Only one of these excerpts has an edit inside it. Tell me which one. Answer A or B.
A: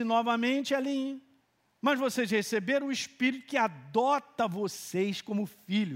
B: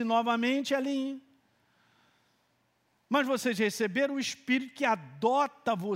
A